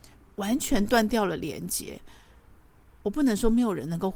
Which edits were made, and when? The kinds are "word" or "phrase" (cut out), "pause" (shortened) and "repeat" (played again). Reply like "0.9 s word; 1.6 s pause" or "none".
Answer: none